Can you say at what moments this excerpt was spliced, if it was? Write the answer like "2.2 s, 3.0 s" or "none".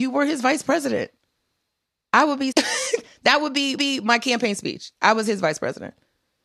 2.5 s, 3.8 s